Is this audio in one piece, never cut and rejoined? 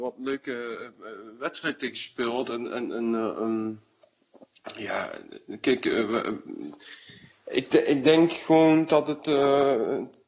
yes; 0 cuts

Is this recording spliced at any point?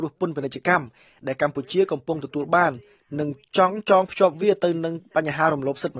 no; 0 cuts

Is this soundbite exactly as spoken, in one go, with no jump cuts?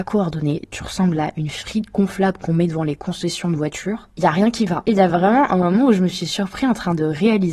yes; 0 cuts

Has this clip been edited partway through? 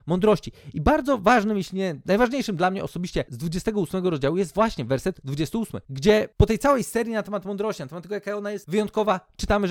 yes; 2 cuts; at 3.3 s, 5.2 s

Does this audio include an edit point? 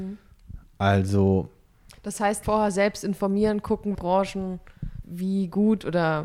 yes; 3 cuts; at 2.4 s, 3.9 s, 5.0 s

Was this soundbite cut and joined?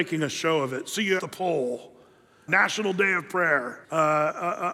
yes; 3 cuts; at 1.2 s, 2.5 s, 3.8 s

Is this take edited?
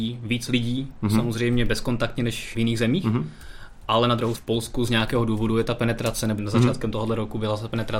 yes; 3 cuts; at 2.5 s, 4.3 s, 6.4 s

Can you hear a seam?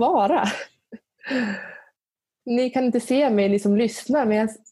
no; 0 cuts

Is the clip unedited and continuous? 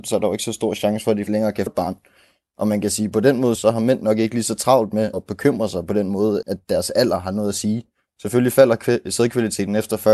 no; 5 cuts; at 1.3 s, 1.7 s, 3.6 s, 5.1 s, 6.4 s

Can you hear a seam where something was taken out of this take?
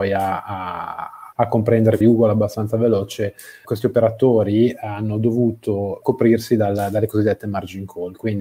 yes; 4 cuts; at 1.3 s, 2.0 s, 3.6 s, 6.0 s

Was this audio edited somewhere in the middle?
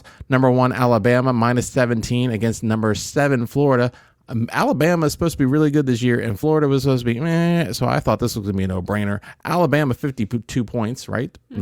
no; 0 cuts

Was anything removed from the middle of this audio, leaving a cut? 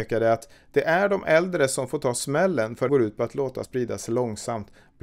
yes; 2 cuts; at 2.9 s, 3.6 s

